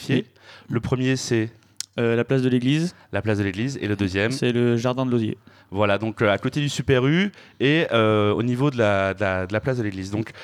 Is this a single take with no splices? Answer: yes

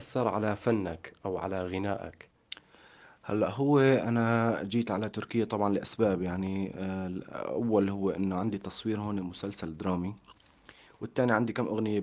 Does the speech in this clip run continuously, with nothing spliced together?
yes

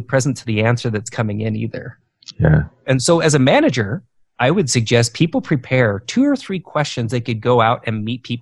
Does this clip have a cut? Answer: no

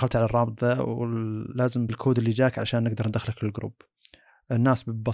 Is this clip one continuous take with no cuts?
no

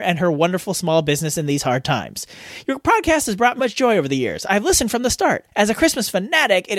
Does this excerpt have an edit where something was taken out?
yes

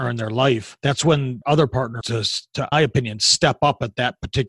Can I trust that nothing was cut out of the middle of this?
no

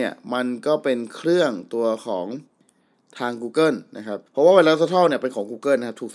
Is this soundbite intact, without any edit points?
no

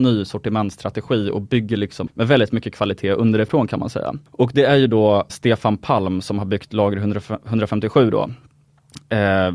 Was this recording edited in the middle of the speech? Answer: yes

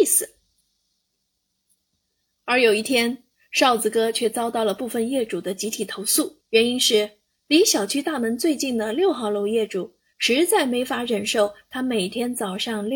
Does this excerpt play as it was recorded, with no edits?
no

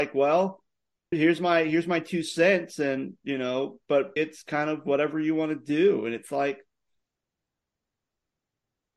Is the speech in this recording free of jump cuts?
no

